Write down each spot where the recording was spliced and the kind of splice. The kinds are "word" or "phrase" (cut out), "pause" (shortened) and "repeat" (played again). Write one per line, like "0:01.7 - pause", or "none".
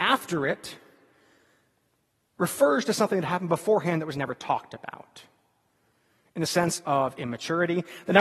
none